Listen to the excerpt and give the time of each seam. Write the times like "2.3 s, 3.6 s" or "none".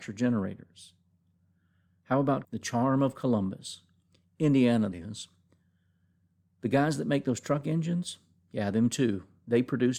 2.4 s, 4.9 s